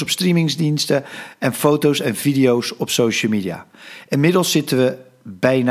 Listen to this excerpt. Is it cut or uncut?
uncut